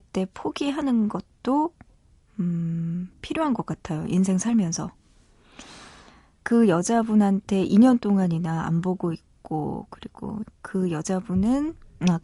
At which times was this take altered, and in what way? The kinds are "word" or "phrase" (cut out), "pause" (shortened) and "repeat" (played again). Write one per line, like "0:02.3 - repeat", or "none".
none